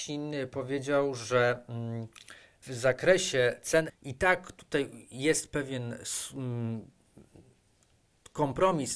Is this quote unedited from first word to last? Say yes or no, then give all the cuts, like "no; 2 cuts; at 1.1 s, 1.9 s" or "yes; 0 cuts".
no; 2 cuts; at 2.6 s, 3.9 s